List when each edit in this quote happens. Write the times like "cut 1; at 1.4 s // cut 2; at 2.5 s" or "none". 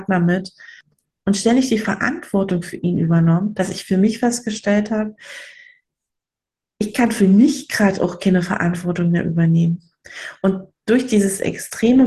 none